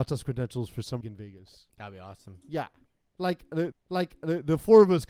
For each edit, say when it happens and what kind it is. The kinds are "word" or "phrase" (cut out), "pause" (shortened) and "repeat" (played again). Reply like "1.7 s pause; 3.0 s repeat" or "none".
1.0 s word; 1.7 s pause; 3.7 s repeat